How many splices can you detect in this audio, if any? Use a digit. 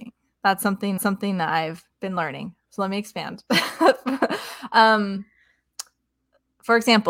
2